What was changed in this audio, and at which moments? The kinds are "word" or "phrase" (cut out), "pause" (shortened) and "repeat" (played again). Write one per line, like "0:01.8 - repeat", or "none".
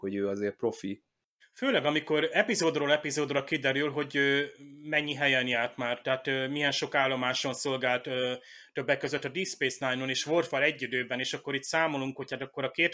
none